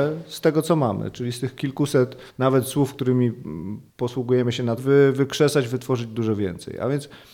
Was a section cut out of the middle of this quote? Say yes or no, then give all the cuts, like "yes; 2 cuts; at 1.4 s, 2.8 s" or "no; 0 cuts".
yes; 3 cuts; at 2.3 s, 3.9 s, 4.8 s